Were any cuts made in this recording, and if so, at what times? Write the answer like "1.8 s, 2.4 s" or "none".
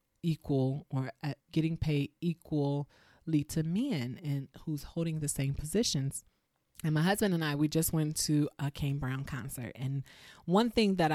1.4 s, 6.5 s